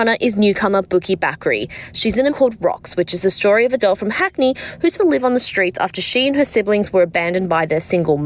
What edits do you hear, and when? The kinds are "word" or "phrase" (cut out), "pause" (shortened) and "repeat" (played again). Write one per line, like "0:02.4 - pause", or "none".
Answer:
0:02.3 - word
0:03.8 - word
0:05.0 - word